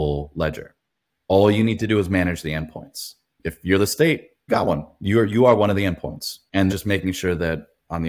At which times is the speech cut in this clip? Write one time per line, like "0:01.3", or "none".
0:04.5
0:06.7